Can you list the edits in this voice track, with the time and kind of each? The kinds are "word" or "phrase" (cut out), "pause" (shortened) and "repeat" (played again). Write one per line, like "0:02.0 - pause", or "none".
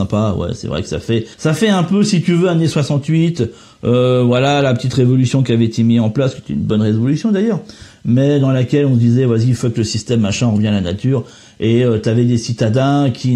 0:01.3 - pause

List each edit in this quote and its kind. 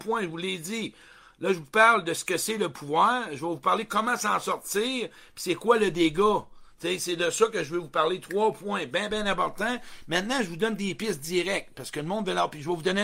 none

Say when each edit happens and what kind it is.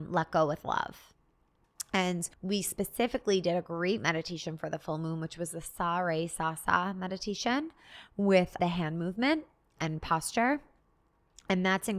0:02.3 - pause
0:08.6 - word

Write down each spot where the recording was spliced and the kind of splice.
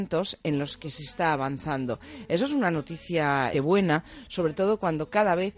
0:03.5 - word

